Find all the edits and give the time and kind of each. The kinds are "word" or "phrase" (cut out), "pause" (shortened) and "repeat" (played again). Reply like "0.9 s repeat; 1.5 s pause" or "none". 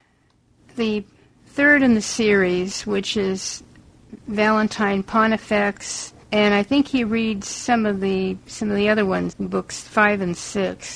6.2 s pause; 9.3 s word